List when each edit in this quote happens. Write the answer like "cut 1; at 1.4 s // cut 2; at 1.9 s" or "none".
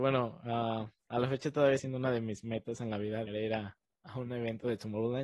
cut 1; at 1.0 s // cut 2; at 1.8 s // cut 3; at 3.3 s

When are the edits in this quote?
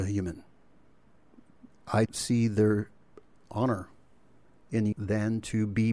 cut 1; at 2.1 s // cut 2; at 3.4 s // cut 3; at 4.9 s

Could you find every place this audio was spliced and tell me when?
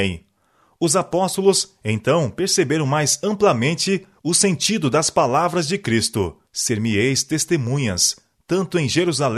cut 1; at 6.5 s

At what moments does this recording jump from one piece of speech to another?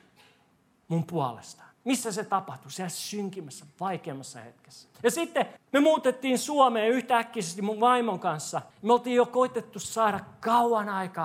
cut 1; at 1.7 s // cut 2; at 4.9 s // cut 3; at 5.6 s // cut 4; at 8.7 s

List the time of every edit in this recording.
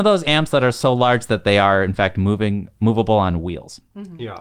none

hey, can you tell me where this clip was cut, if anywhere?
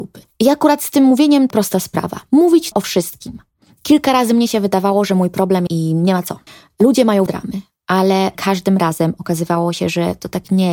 cut 1; at 1.5 s // cut 2; at 2.7 s // cut 3; at 3.6 s // cut 4; at 5.7 s // cut 5; at 6.5 s // cut 6; at 7.3 s // cut 7; at 8.3 s

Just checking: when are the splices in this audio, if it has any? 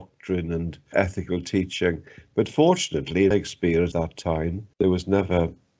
cut 1; at 0.9 s // cut 2; at 3.3 s // cut 3; at 3.9 s // cut 4; at 4.7 s

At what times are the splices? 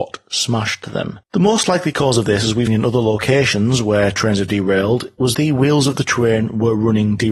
cut 1; at 1.2 s // cut 2; at 2.7 s // cut 3; at 5.3 s

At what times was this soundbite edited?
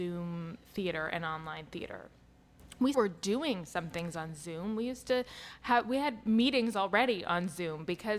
cut 1; at 2.9 s

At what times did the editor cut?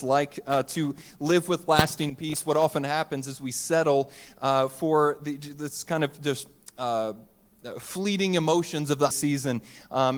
cut 1; at 9.1 s

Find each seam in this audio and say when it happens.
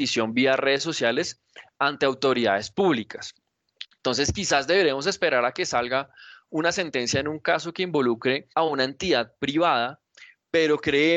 cut 1; at 8.5 s

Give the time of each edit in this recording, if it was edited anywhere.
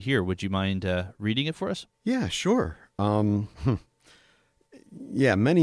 cut 1; at 1.9 s // cut 2; at 3.5 s

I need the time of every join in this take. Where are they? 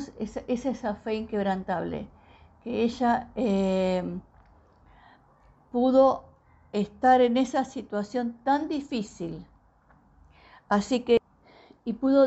none

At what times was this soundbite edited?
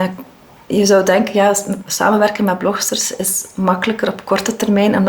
none

